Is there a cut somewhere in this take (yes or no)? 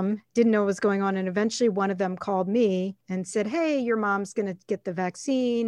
yes